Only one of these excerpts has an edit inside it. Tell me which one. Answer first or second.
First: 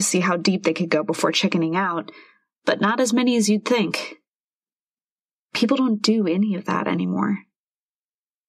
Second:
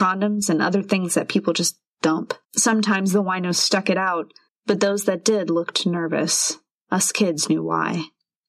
second